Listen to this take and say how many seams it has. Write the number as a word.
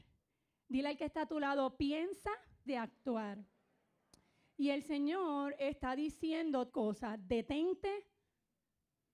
two